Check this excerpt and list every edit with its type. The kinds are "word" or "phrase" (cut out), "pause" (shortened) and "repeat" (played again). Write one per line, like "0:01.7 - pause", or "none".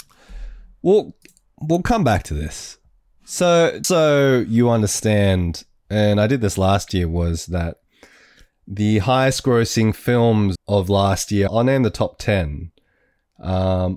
0:03.8 - word
0:10.6 - word
0:11.5 - word